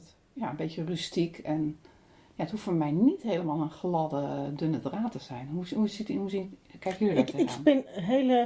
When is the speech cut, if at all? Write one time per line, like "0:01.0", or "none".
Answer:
none